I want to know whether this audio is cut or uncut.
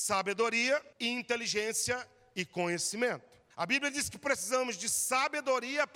cut